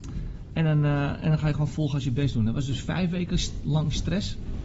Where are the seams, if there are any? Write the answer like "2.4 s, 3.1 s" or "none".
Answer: none